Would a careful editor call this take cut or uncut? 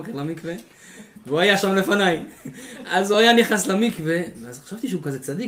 uncut